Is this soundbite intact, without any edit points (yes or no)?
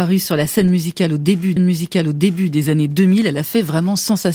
no